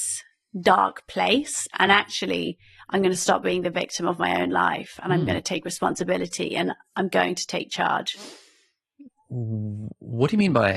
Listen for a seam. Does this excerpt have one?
no; 0 cuts

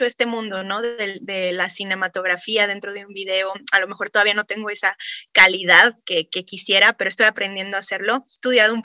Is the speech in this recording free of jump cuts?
yes; 0 cuts

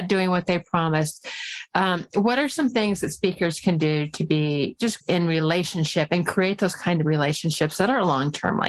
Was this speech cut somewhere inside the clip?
yes; 1 cut; at 5.0 s

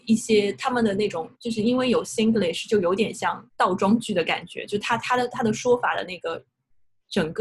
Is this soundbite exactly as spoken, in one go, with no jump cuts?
no; 2 cuts; at 1.3 s, 3.5 s

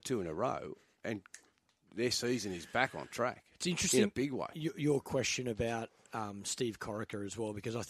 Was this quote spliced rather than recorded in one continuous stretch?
no; 0 cuts

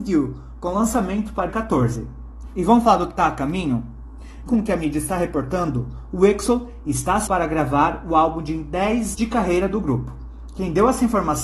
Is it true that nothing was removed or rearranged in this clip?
no; 4 cuts; at 1.5 s, 4.5 s, 7.3 s, 9.1 s

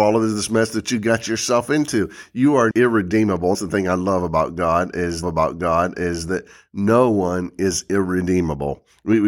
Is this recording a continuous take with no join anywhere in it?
no; 3 cuts; at 2.7 s, 3.5 s, 5.2 s

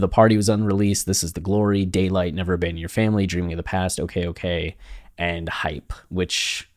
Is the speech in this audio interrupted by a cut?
no; 0 cuts

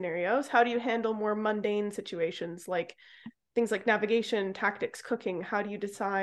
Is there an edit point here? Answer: no; 0 cuts

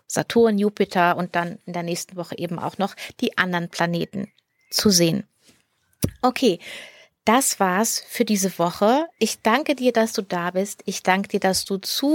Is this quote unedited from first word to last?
yes; 0 cuts

